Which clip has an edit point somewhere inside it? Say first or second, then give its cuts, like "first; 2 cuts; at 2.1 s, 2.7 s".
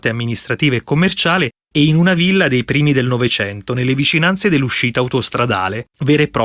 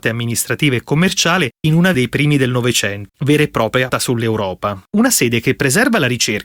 second; 5 cuts; at 1.6 s, 1.9 s, 3.1 s, 3.9 s, 4.9 s